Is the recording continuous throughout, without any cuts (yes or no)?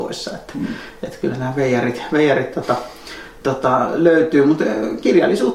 yes